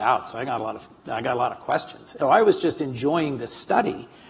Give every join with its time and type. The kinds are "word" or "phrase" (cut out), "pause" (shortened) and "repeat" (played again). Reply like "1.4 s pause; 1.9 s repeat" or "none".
2.2 s word